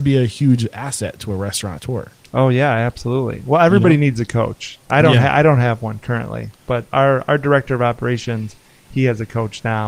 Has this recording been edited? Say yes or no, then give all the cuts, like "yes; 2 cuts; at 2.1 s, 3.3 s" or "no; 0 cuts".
no; 0 cuts